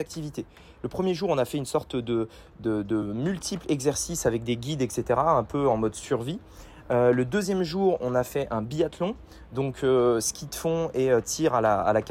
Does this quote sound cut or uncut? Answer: uncut